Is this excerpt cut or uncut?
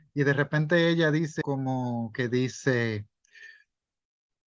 cut